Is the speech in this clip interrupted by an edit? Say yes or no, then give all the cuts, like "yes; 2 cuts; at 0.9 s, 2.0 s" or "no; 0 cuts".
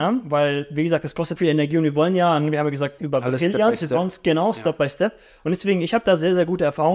yes; 2 cuts; at 1.4 s, 3.0 s